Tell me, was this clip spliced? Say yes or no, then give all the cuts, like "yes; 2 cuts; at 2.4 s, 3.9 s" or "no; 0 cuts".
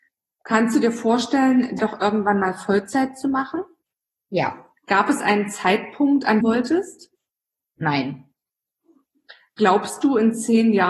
yes; 3 cuts; at 1.8 s, 4.8 s, 6.4 s